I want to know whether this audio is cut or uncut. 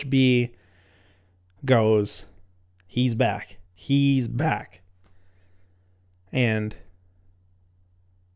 cut